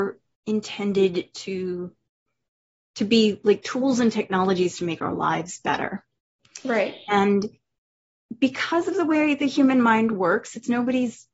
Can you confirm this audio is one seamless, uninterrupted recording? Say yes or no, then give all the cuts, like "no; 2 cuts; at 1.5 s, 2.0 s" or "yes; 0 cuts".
yes; 0 cuts